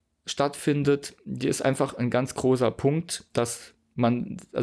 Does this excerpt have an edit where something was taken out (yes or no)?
yes